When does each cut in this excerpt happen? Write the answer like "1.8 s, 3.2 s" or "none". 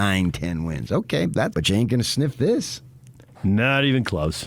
1.5 s